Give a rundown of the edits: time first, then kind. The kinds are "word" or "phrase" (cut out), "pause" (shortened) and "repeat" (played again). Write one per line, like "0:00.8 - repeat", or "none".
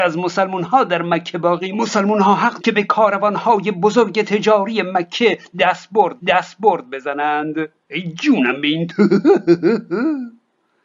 0:01.7 - word
0:02.6 - word
0:06.2 - repeat
0:08.9 - word